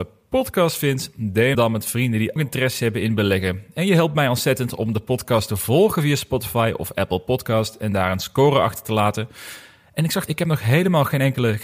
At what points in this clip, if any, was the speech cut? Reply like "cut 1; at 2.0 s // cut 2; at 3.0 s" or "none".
cut 1; at 1.5 s // cut 2; at 2.4 s // cut 3; at 10.3 s